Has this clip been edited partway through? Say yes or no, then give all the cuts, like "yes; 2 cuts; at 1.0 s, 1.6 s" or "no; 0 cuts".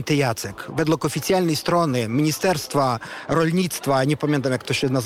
no; 0 cuts